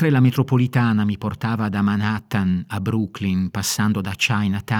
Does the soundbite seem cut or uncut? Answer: uncut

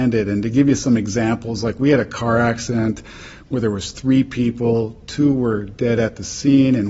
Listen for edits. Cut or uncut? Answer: uncut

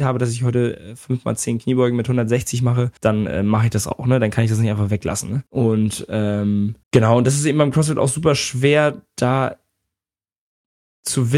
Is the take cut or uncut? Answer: cut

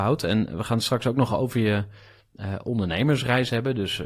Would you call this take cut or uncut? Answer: uncut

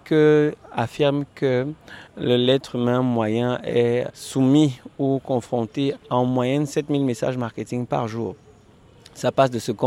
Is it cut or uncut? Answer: cut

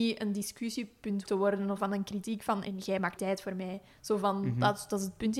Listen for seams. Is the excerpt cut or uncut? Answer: cut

